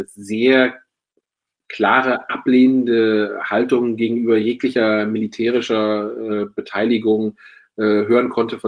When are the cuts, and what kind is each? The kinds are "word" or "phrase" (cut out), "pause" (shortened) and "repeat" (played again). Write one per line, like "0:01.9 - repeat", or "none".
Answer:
none